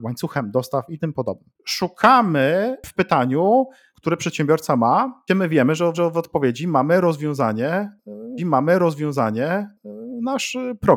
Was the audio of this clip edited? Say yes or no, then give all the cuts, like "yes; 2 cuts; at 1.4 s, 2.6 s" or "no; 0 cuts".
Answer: yes; 4 cuts; at 3.9 s, 5.3 s, 5.9 s, 8.4 s